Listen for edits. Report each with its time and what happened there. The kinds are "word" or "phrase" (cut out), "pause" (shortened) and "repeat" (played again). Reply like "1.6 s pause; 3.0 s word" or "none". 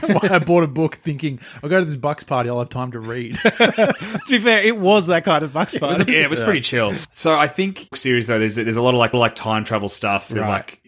6.1 s word; 7.9 s phrase; 9.1 s repeat